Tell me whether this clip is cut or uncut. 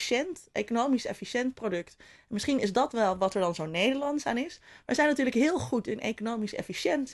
uncut